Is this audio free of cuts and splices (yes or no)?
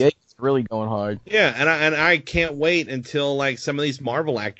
yes